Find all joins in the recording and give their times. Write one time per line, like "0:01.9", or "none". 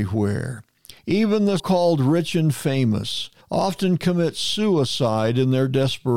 0:01.0
0:01.6
0:03.4